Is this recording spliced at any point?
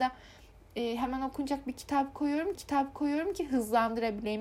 yes; 1 cut; at 2.5 s

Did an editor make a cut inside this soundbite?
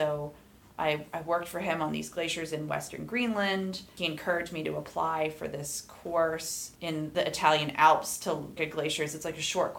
yes; 1 cut; at 8.6 s

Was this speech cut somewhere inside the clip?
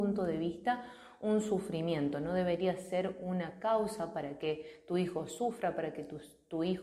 no; 0 cuts

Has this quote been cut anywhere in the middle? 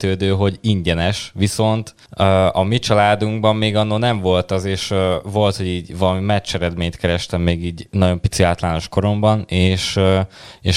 yes; 1 cut; at 2.1 s

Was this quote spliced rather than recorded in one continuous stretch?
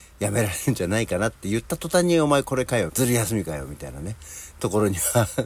yes; 1 cut; at 2.9 s

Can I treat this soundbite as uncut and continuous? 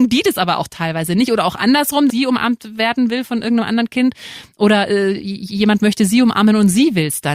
no; 1 cut; at 2.1 s

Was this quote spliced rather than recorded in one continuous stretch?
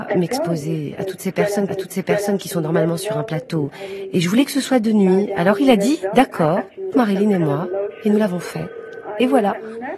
yes; 2 cuts; at 1.7 s, 6.9 s

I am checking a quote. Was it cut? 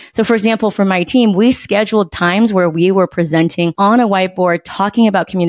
no; 0 cuts

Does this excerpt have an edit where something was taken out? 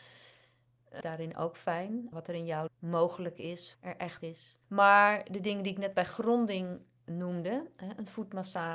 yes; 6 cuts; at 1.0 s, 2.1 s, 2.7 s, 3.7 s, 4.2 s, 4.6 s

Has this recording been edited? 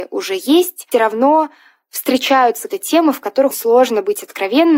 yes; 3 cuts; at 0.9 s, 2.7 s, 3.5 s

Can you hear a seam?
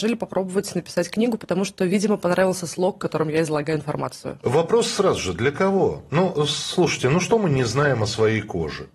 no; 0 cuts

